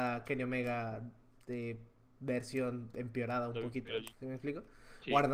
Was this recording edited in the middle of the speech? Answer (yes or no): no